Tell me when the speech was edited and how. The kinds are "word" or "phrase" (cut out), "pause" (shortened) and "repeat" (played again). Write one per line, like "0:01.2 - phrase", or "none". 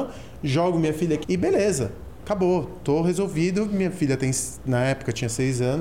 0:01.2 - word